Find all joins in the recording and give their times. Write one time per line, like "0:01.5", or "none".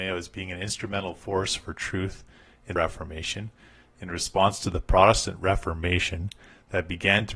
0:02.8